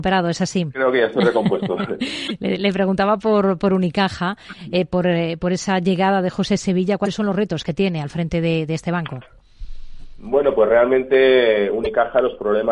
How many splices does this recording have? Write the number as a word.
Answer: zero